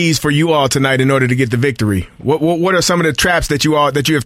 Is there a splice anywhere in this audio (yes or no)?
no